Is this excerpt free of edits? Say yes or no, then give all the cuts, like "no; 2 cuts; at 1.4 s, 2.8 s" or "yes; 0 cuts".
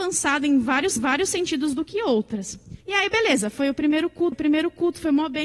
no; 3 cuts; at 1.0 s, 2.8 s, 4.3 s